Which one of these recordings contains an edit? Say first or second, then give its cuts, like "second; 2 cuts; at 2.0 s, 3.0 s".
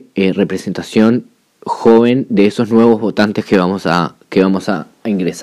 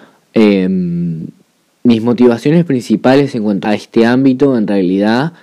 second; 1 cut; at 3.6 s